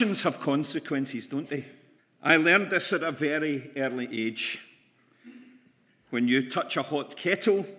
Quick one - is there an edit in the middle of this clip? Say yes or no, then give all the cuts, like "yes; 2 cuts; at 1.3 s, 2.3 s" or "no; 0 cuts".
yes; 1 cut; at 2.0 s